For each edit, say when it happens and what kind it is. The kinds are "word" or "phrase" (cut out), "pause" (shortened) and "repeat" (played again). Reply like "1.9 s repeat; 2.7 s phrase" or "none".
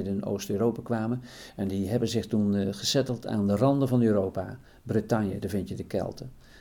none